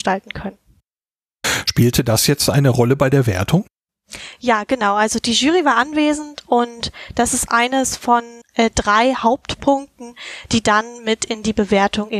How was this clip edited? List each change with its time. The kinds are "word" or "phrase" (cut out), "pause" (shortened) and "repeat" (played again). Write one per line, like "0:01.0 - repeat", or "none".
0:08.4 - pause